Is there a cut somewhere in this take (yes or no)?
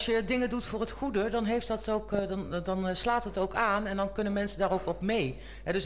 no